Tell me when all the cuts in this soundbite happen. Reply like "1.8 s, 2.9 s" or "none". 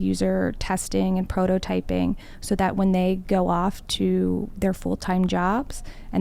none